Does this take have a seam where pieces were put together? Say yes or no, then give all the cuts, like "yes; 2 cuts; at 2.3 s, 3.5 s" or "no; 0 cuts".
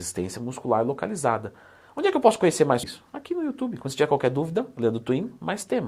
yes; 1 cut; at 2.8 s